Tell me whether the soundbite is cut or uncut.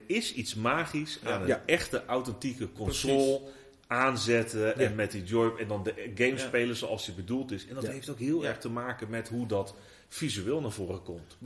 uncut